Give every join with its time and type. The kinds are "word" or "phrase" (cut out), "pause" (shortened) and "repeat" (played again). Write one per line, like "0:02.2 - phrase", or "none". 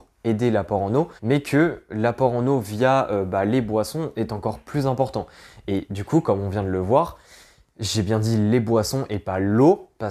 0:01.2 - pause